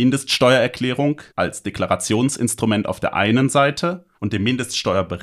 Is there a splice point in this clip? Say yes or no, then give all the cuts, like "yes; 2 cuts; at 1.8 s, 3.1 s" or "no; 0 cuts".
yes; 2 cuts; at 1.3 s, 4.1 s